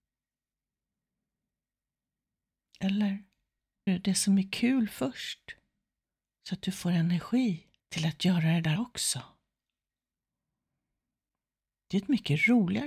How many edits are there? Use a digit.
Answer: 4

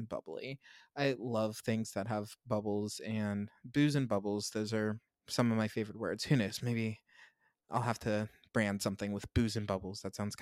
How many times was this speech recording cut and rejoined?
1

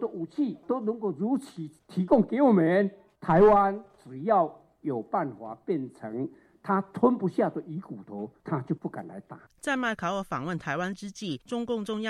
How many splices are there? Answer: 0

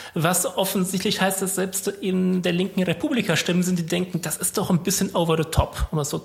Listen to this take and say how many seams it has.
0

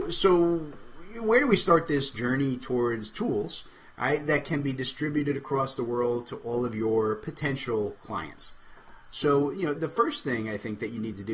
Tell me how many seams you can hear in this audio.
1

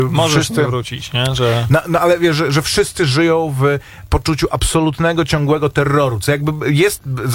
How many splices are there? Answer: 0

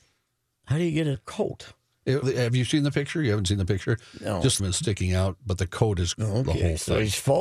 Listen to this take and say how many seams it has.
4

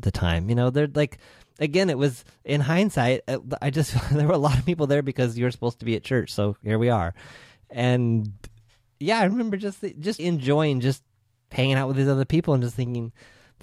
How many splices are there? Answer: 1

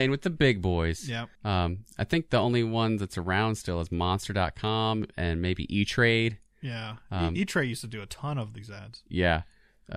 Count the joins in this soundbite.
1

